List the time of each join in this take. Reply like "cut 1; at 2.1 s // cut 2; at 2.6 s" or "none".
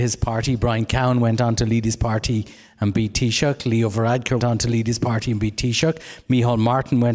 cut 1; at 4.4 s